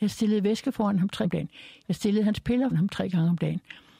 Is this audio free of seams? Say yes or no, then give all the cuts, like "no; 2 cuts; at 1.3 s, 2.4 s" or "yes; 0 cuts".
no; 2 cuts; at 1.2 s, 2.7 s